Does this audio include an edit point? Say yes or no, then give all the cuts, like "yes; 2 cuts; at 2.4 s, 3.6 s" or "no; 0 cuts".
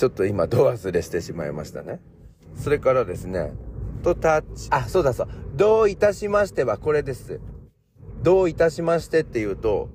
yes; 2 cuts; at 4.0 s, 4.7 s